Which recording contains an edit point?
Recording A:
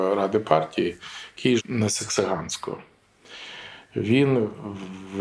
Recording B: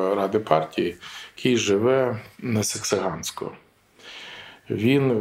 A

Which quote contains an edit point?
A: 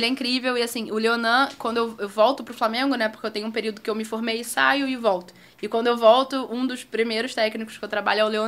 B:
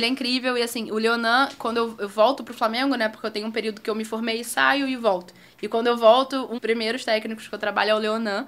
B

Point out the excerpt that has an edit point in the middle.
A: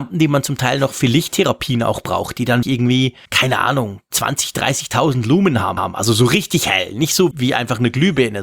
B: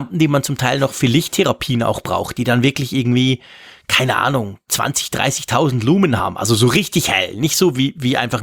A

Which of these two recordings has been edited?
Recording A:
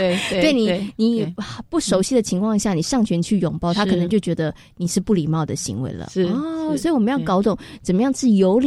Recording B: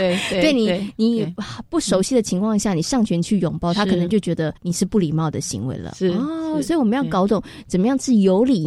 B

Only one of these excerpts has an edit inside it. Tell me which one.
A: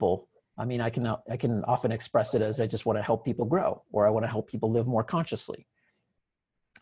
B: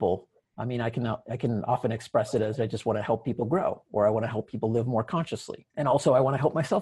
B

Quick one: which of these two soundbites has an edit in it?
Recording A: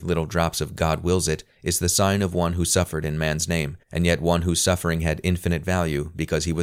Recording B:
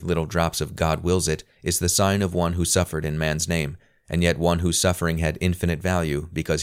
A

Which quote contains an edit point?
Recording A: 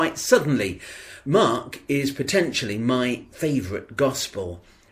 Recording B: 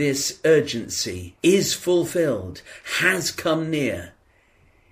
B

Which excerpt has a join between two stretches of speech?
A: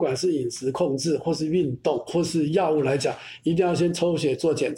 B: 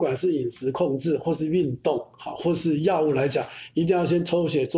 A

